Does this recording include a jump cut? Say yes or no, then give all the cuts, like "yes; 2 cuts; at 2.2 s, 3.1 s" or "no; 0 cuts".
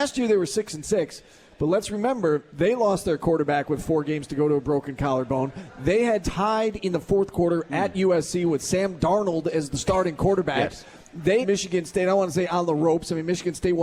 yes; 2 cuts; at 6.2 s, 11.4 s